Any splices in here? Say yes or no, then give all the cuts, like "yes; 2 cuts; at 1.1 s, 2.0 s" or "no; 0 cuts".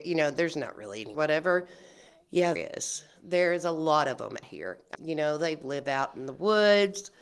yes; 4 cuts; at 1.1 s, 2.6 s, 4.4 s, 4.9 s